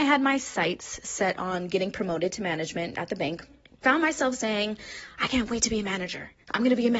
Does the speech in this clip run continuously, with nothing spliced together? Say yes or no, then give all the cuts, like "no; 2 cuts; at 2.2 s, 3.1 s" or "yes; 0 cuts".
no; 1 cut; at 3.8 s